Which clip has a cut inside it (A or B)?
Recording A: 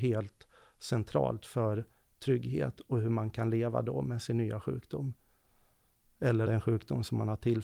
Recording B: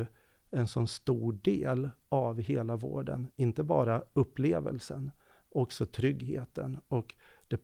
A